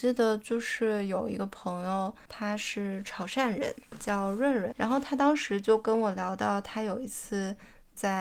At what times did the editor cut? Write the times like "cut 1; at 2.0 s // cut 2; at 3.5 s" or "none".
cut 1; at 2.3 s // cut 2; at 4.0 s // cut 3; at 4.7 s